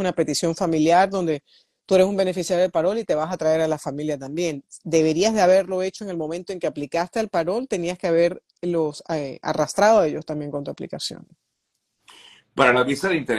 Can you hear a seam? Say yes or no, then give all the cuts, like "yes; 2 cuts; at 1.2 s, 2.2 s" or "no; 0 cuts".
no; 0 cuts